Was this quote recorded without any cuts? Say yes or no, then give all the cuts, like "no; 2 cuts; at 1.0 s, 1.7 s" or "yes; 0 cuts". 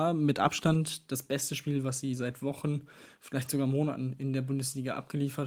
yes; 0 cuts